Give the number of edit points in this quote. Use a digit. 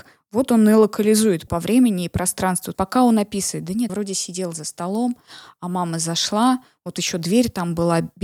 4